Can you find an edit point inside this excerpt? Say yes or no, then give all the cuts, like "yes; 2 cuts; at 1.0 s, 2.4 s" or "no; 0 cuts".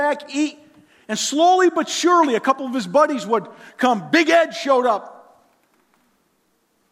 no; 0 cuts